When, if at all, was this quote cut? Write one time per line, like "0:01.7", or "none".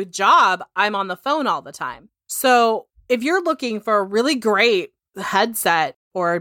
none